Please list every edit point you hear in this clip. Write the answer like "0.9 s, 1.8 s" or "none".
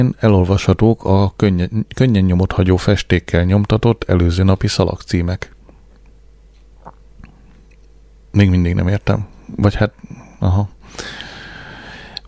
none